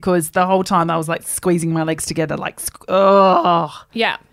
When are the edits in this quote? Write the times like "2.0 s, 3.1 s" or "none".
none